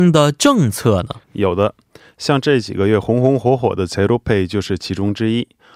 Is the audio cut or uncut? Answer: cut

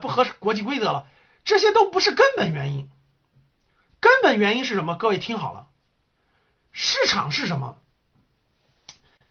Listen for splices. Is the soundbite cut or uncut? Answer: uncut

